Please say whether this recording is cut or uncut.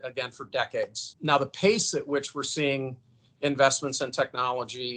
uncut